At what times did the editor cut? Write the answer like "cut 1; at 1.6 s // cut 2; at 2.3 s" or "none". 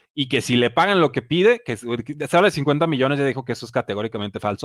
none